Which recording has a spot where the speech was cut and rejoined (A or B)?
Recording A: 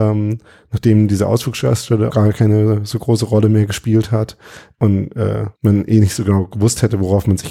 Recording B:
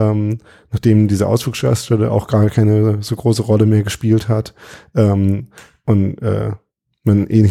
A